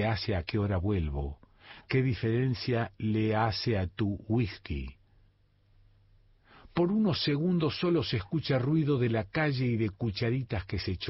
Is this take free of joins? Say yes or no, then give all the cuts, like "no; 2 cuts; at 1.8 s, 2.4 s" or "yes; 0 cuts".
yes; 0 cuts